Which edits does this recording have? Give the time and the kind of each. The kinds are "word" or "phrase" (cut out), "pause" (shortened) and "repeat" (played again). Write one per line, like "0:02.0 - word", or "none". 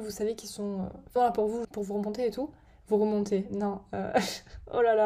0:01.2 - word
0:01.6 - word